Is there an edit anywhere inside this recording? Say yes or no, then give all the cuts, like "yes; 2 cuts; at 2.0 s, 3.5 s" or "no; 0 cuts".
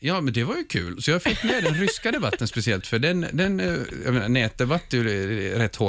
no; 0 cuts